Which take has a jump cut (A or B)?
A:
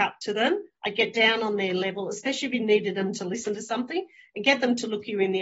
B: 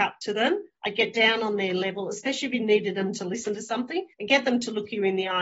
B